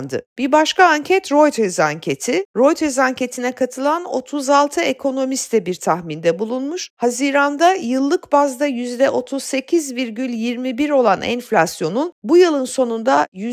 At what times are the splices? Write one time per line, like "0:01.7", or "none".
none